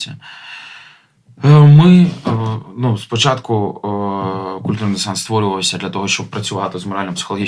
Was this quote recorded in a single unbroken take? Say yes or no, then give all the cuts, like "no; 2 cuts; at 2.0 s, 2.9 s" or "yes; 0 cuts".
yes; 0 cuts